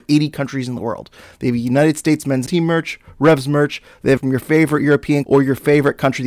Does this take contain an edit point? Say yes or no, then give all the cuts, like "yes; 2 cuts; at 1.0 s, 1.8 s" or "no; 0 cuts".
yes; 3 cuts; at 2.5 s, 4.2 s, 5.2 s